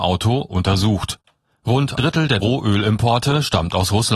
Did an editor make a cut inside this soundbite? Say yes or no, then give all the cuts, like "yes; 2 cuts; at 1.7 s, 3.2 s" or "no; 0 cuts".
yes; 2 cuts; at 2.0 s, 2.4 s